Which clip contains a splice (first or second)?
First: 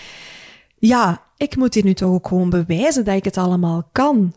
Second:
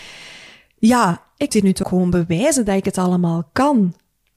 second